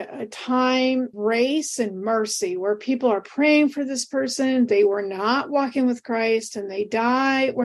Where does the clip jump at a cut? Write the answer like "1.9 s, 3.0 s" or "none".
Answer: 1.1 s